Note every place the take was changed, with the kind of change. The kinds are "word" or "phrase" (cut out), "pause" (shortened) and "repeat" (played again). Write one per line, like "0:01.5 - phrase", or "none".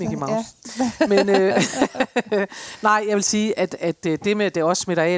none